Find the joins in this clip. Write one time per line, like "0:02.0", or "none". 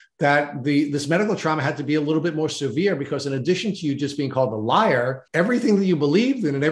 0:05.3